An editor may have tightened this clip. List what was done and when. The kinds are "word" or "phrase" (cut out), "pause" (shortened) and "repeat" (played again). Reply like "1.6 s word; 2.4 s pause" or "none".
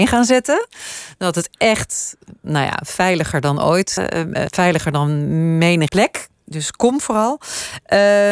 4.0 s word; 4.5 s word; 5.9 s word